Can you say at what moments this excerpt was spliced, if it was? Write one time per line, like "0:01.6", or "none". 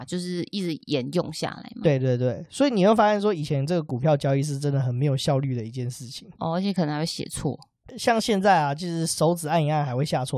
0:06.3